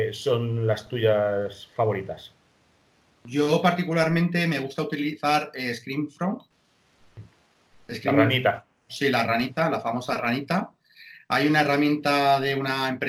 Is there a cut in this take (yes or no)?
no